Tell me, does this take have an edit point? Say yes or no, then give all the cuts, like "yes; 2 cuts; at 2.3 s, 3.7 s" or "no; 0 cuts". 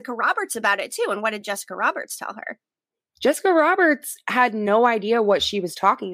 no; 0 cuts